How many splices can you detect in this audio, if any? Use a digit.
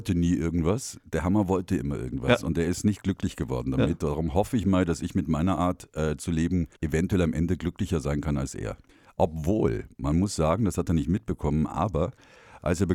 2